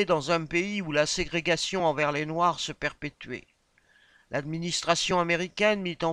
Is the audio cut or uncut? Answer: uncut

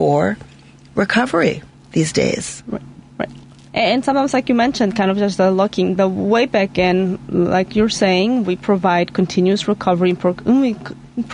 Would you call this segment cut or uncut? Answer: uncut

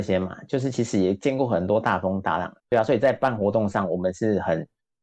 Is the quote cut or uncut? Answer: cut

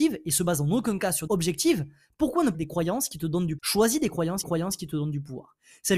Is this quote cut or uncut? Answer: cut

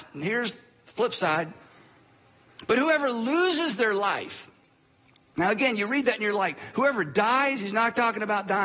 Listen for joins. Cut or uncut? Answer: uncut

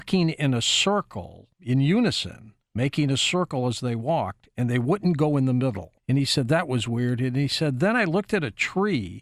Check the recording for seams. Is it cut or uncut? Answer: cut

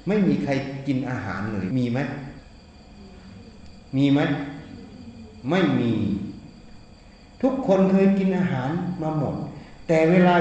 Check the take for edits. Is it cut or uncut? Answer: uncut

